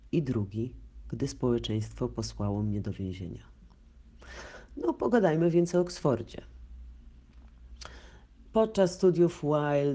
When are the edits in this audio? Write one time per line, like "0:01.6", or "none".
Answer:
none